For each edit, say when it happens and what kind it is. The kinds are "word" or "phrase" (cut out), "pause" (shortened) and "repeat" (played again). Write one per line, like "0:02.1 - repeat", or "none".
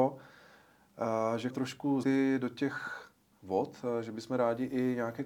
0:01.5 - word
0:02.0 - word
0:03.3 - word